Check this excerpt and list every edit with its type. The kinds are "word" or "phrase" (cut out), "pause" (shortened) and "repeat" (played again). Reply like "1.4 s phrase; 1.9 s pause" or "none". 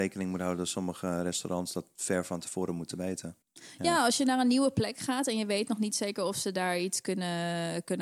3.4 s pause